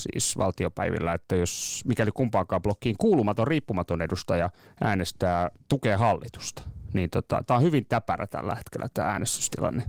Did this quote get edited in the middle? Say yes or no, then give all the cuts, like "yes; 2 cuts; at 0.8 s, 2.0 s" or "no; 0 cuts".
yes; 2 cuts; at 4.7 s, 7.5 s